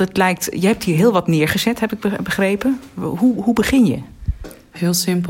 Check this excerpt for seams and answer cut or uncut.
uncut